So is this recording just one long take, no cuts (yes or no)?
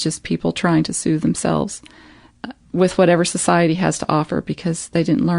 yes